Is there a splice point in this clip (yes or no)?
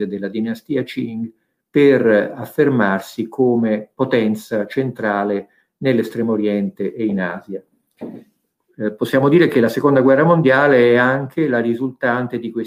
no